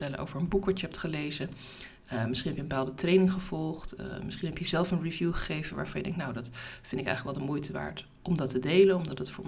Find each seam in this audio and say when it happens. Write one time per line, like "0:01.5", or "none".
none